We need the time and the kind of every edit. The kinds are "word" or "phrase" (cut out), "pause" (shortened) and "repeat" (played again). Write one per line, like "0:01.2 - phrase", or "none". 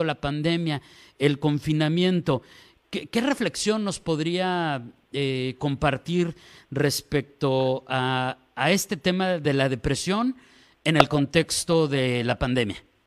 none